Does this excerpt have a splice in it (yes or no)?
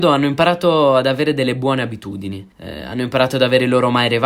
yes